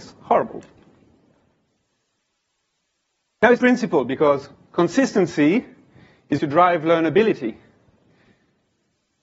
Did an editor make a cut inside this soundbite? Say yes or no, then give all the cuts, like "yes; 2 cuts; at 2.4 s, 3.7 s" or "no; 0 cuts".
yes; 2 cuts; at 3.6 s, 6.4 s